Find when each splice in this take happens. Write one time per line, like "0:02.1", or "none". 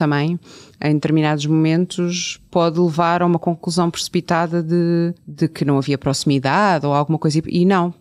none